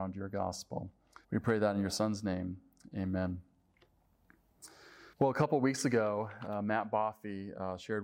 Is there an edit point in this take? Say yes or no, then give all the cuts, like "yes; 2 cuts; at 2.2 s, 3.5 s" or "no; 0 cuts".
yes; 2 cuts; at 1.2 s, 5.1 s